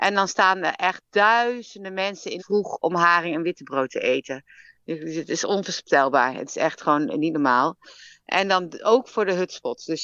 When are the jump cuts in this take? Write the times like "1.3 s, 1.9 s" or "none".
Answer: 2.4 s